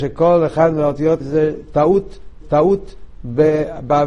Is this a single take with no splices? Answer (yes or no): no